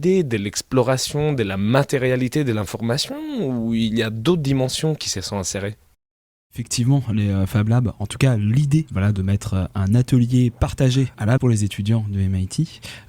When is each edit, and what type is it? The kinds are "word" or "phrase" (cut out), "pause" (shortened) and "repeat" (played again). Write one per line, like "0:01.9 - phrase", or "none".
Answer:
0:11.4 - word